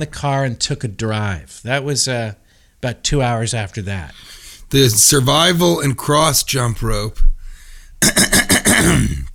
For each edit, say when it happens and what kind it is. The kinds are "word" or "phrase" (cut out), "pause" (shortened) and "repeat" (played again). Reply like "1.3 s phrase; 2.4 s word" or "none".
none